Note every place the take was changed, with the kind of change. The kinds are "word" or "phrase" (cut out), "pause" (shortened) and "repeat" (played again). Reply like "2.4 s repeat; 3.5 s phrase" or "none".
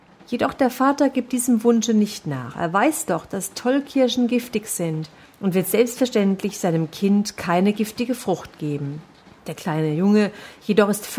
5.2 s pause; 9.2 s pause